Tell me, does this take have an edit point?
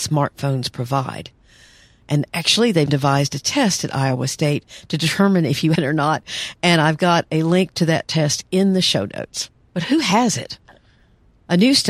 yes; 3 cuts; at 2.9 s, 5.7 s, 9.5 s

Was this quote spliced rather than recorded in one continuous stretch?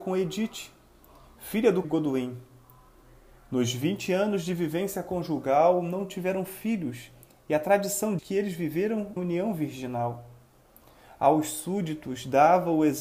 yes; 3 cuts; at 1.8 s, 8.2 s, 9.2 s

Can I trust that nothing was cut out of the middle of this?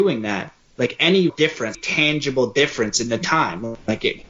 no; 2 cuts; at 1.3 s, 1.7 s

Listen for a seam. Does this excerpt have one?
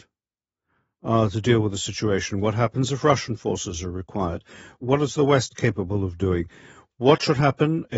no; 0 cuts

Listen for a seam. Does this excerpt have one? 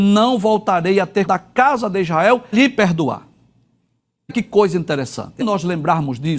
yes; 4 cuts; at 1.3 s, 2.5 s, 4.3 s, 5.4 s

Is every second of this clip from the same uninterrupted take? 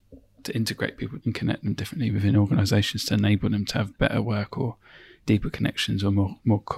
no; 1 cut; at 1.2 s

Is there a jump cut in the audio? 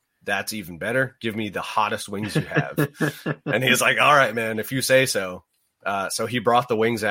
no; 0 cuts

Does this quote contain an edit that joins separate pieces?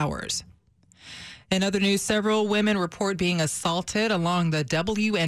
no; 0 cuts

